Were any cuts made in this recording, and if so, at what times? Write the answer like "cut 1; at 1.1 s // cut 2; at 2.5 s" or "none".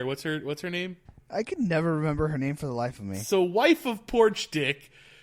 cut 1; at 1.1 s